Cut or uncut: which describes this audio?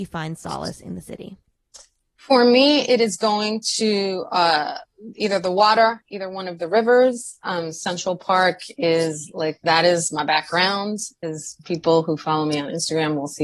uncut